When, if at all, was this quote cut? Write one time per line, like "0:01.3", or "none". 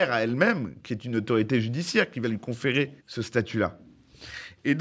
0:03.0